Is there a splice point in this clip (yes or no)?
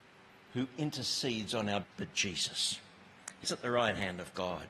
yes